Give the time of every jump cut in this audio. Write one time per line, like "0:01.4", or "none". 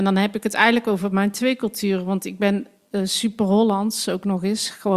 none

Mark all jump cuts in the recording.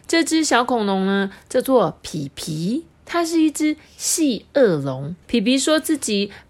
0:02.9
0:05.2

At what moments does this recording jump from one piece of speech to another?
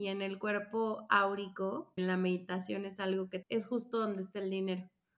0:02.0
0:03.4

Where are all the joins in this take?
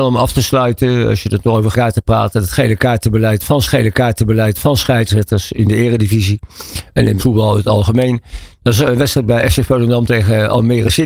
0:01.7
0:03.6
0:07.2

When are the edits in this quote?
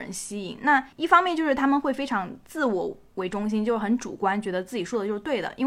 0:00.9

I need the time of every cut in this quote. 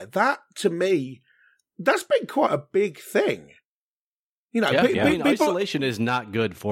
none

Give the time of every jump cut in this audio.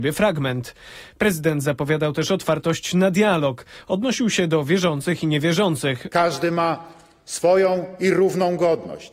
none

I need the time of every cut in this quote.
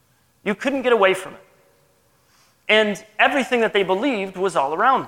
none

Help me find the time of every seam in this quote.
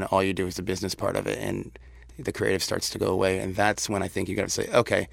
none

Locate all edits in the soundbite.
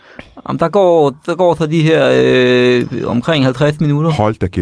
none

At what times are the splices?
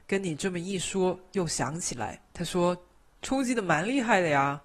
0:02.3

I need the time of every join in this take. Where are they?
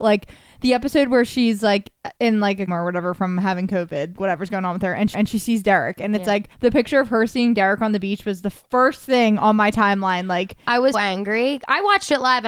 0:02.2
0:02.7
0:04.2
0:05.1
0:06.5
0:10.9

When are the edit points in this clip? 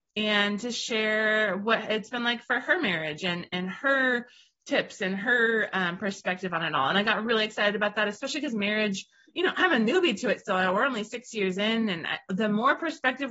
none

